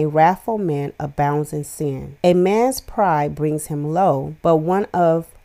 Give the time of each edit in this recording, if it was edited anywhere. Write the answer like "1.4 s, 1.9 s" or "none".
2.2 s, 4.4 s